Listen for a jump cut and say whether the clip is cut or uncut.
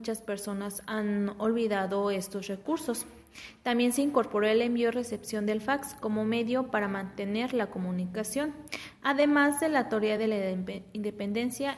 uncut